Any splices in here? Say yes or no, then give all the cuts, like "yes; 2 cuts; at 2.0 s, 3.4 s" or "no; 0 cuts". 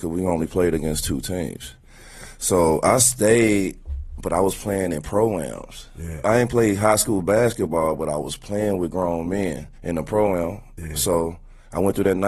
yes; 1 cut; at 9.7 s